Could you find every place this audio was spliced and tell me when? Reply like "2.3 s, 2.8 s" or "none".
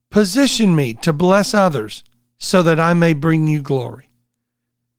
none